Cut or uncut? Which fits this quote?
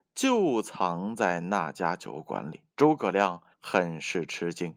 cut